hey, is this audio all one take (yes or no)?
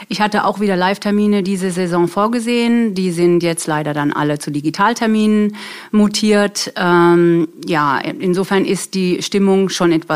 yes